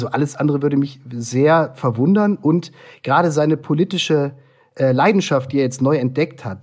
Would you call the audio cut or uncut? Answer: uncut